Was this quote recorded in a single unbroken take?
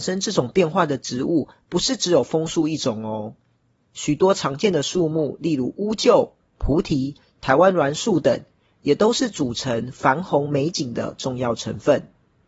yes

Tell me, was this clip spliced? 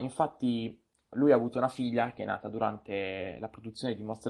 no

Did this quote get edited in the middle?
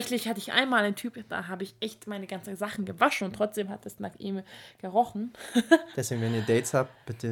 no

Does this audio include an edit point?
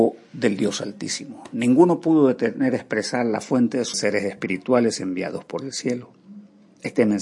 yes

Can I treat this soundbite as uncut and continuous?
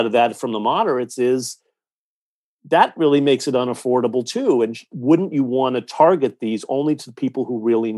yes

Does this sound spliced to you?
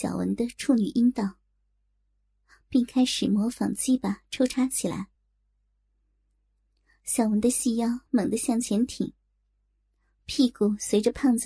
no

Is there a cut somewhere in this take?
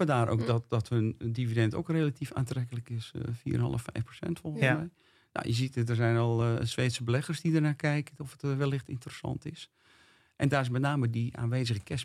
no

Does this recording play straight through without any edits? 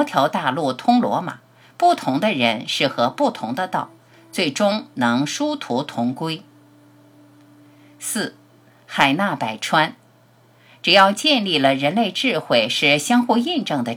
yes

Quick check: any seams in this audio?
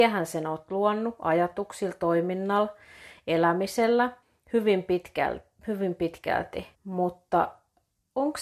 yes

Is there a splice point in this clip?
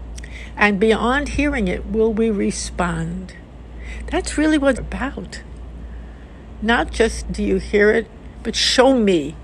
yes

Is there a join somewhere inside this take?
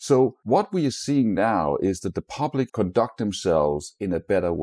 yes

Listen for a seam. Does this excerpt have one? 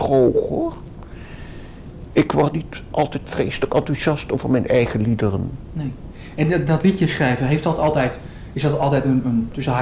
no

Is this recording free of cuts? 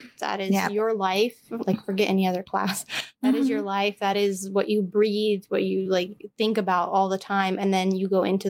yes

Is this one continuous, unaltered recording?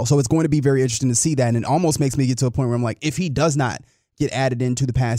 yes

